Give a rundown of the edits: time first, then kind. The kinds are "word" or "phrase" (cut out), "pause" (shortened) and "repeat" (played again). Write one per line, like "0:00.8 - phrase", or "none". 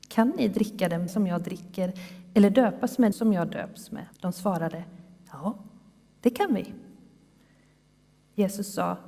0:01.1 - word
0:03.1 - phrase
0:04.1 - pause